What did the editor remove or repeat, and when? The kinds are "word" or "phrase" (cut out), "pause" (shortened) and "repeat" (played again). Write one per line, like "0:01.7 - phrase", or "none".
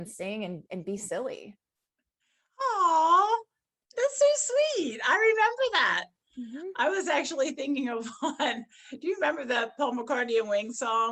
none